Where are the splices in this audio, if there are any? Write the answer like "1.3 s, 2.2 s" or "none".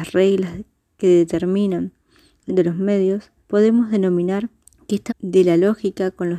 2.5 s, 3.4 s, 4.6 s, 5.1 s